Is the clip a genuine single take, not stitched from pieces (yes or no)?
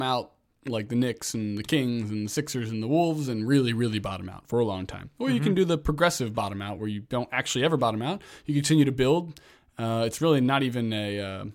yes